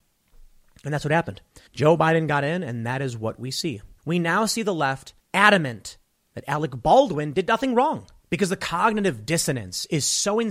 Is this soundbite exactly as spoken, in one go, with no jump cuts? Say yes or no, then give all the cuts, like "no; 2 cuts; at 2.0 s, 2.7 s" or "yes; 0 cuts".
no; 3 cuts; at 1.7 s, 4.0 s, 5.2 s